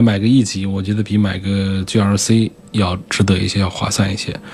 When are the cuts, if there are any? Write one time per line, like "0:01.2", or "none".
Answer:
0:03.1

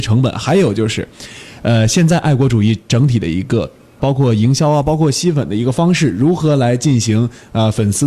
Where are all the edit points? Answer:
0:04.0

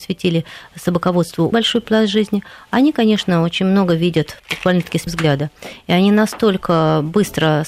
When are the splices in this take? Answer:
0:01.5
0:05.1

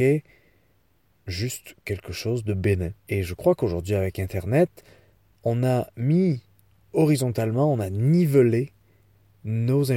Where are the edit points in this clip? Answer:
0:03.0

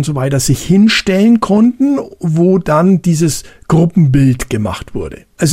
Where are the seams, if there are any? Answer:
none

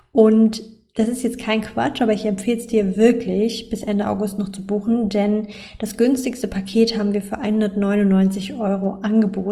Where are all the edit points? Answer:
none

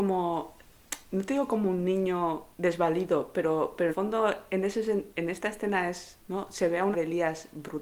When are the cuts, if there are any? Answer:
0:01.0
0:02.5
0:03.9
0:05.1
0:06.2
0:06.9

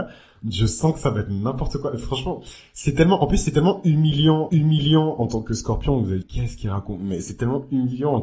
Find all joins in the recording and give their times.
0:04.5
0:06.2

